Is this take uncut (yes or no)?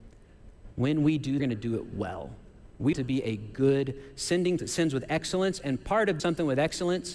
no